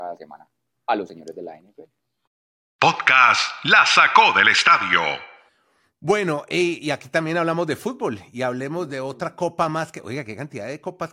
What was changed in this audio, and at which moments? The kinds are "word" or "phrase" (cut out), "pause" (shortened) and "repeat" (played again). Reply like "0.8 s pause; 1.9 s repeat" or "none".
none